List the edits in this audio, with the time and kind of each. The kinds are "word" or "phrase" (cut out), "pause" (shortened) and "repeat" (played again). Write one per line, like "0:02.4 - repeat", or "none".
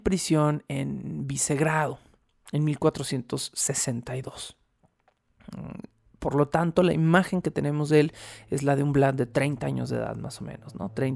none